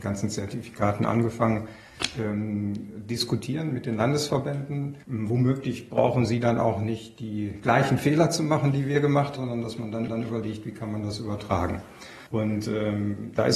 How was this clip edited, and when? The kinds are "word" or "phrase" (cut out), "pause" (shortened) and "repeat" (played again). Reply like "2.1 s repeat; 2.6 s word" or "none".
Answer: 5.0 s pause; 9.4 s word; 10.1 s repeat; 12.3 s pause